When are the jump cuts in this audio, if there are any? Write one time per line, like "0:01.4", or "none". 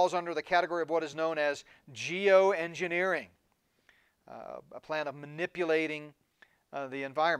none